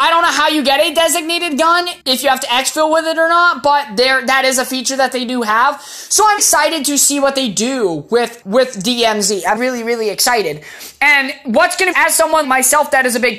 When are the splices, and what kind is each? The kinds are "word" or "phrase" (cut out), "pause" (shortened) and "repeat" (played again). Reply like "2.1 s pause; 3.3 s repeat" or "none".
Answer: 2.0 s pause; 6.4 s word; 8.4 s word; 9.6 s word; 11.9 s phrase; 12.4 s word